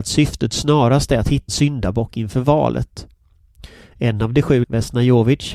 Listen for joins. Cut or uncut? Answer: cut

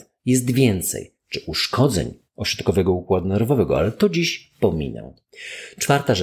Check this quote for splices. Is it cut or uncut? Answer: uncut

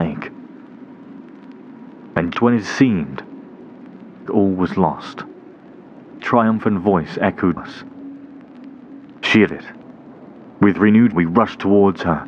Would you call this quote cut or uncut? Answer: cut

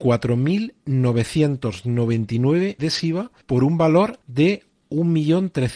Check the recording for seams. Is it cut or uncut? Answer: cut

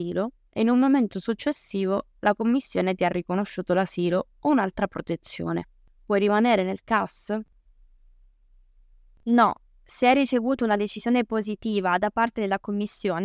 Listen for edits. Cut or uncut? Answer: uncut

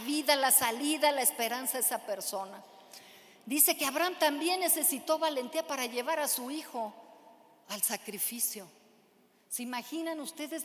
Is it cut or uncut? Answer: uncut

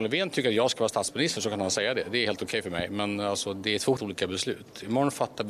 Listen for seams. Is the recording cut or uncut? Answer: cut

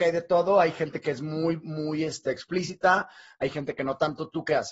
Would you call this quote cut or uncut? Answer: uncut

